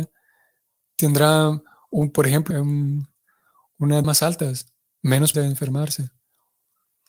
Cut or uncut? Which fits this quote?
cut